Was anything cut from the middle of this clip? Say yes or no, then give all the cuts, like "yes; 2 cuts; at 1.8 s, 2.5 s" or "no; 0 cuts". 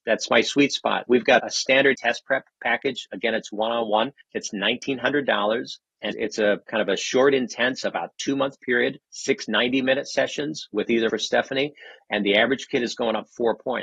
yes; 7 cuts; at 1.1 s, 1.4 s, 1.9 s, 4.2 s, 6.1 s, 9.0 s, 11.1 s